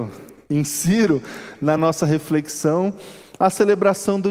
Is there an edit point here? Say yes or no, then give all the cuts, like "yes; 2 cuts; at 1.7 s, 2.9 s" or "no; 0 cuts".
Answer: no; 0 cuts